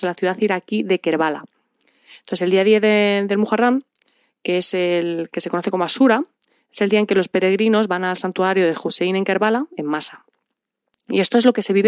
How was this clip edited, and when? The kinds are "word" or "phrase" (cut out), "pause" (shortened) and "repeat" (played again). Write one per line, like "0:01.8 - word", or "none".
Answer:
none